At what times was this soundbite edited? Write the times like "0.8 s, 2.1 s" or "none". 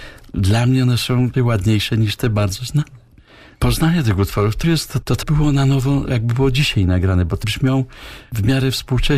1.3 s, 4.6 s, 5.2 s, 7.4 s